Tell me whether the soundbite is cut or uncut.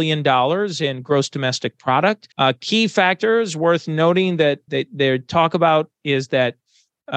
cut